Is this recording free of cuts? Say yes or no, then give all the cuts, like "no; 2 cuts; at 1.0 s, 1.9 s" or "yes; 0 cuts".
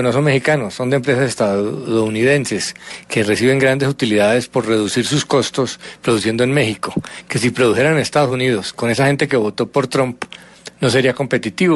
yes; 0 cuts